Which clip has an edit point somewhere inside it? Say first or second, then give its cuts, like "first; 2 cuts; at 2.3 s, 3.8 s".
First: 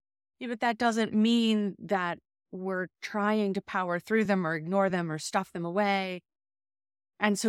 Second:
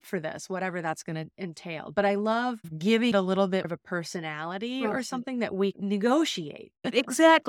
second; 3 cuts; at 3.1 s, 3.6 s, 5.7 s